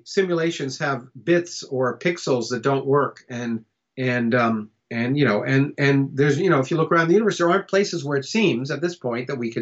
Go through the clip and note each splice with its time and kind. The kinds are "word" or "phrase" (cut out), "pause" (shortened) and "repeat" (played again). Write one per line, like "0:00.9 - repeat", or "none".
0:03.7 - pause
0:04.8 - pause